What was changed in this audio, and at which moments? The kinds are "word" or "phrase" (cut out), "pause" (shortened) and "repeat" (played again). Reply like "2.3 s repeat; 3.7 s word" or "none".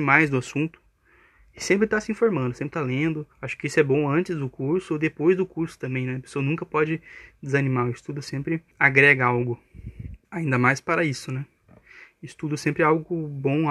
3.3 s pause; 8.7 s pause; 10.2 s pause